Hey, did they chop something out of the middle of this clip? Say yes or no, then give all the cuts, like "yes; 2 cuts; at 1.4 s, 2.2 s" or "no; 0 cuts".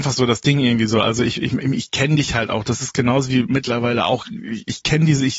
yes; 1 cut; at 3.5 s